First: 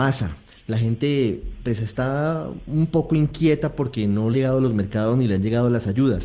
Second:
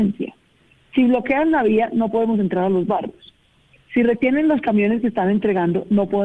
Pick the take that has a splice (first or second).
first